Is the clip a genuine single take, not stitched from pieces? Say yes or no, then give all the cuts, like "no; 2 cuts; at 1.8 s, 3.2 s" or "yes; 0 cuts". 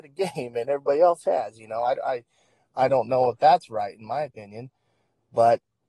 yes; 0 cuts